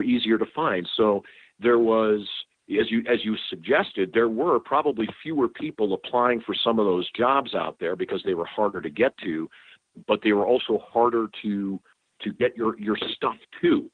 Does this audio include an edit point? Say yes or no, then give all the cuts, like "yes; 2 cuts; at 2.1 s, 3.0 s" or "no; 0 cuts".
no; 0 cuts